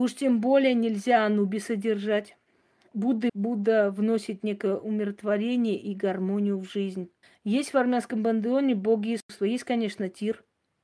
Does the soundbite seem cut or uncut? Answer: cut